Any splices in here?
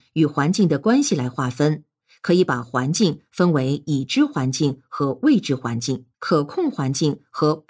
yes; 1 cut; at 6.1 s

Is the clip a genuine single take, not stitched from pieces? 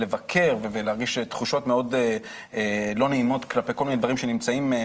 yes; 0 cuts

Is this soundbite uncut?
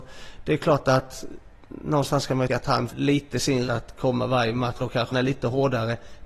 no; 5 cuts; at 2.5 s, 2.9 s, 3.7 s, 4.8 s, 5.1 s

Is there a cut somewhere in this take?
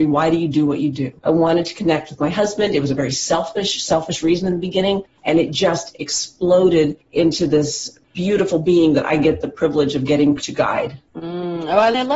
yes; 2 cuts; at 1.2 s, 11.1 s

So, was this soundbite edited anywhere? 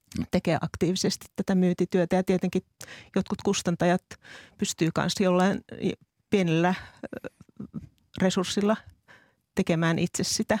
no; 0 cuts

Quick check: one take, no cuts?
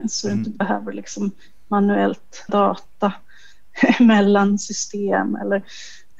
no; 1 cut; at 2.5 s

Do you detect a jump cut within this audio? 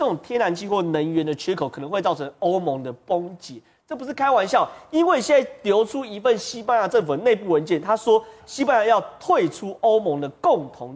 no; 0 cuts

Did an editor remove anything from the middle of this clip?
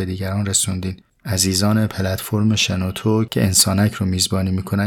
no; 0 cuts

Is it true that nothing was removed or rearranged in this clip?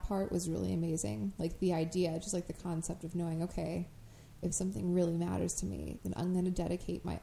yes; 0 cuts

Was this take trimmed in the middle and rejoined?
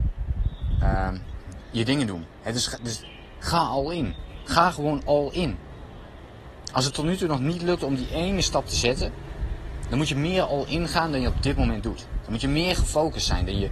no; 0 cuts

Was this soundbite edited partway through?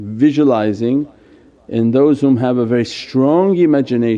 no; 0 cuts

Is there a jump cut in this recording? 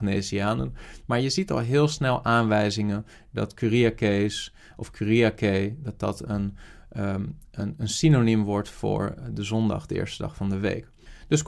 no; 0 cuts

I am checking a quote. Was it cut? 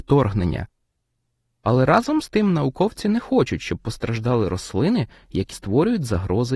yes; 1 cut; at 5.5 s

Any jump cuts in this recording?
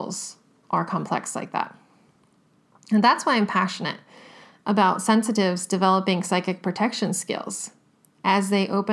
no; 0 cuts

